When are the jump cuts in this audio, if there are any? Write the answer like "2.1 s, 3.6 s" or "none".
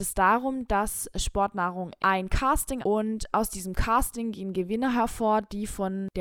2.0 s, 2.8 s